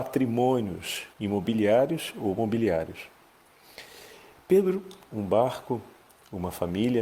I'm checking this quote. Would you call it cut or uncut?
cut